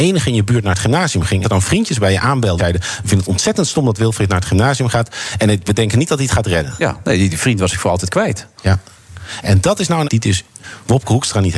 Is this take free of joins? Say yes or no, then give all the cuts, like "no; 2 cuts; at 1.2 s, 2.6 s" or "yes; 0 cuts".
no; 3 cuts; at 1.4 s, 2.6 s, 10.0 s